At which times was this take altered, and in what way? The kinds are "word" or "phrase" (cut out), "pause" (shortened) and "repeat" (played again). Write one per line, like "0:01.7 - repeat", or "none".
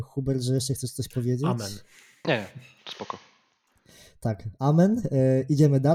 none